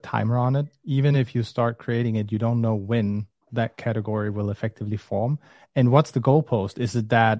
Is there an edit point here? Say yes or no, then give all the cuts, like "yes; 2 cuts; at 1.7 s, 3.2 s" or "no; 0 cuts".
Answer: no; 0 cuts